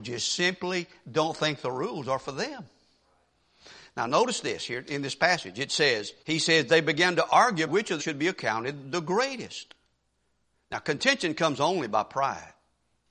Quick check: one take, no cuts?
no; 3 cuts; at 6.2 s, 7.7 s, 8.0 s

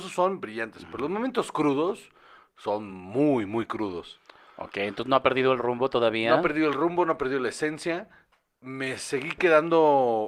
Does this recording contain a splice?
no; 0 cuts

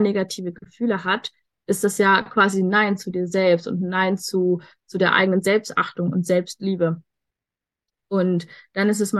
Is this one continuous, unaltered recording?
yes; 0 cuts

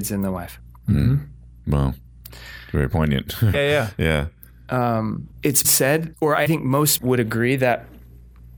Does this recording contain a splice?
yes; 5 cuts; at 3.5 s, 5.6 s, 6.1 s, 6.5 s, 7.0 s

